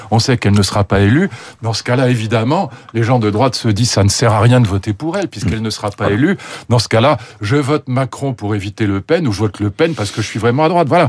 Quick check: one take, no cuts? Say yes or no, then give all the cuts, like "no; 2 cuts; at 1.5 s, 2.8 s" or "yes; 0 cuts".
yes; 0 cuts